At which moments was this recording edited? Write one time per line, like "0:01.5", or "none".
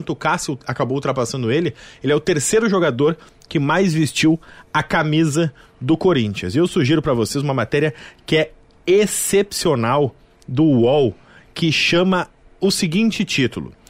none